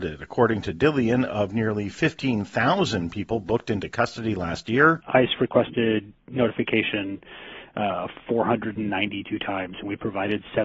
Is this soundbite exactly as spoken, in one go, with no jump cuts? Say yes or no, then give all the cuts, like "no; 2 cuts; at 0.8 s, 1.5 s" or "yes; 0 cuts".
yes; 0 cuts